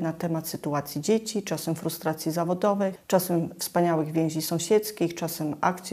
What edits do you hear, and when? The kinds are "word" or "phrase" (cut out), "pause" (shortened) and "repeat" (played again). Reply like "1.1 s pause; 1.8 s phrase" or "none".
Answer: none